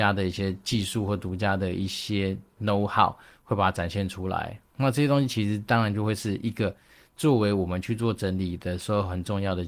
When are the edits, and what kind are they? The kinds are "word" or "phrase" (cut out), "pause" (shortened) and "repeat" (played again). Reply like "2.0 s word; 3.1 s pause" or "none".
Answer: none